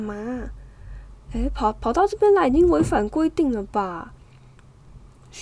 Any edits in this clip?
no; 0 cuts

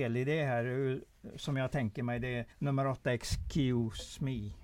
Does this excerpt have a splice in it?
yes; 1 cut; at 2.5 s

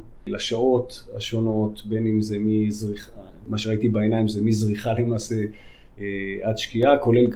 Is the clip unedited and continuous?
yes; 0 cuts

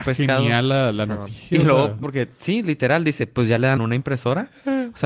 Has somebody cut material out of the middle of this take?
yes; 2 cuts; at 2.0 s, 3.8 s

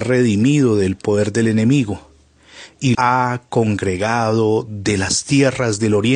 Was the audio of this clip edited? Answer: yes; 1 cut; at 2.9 s

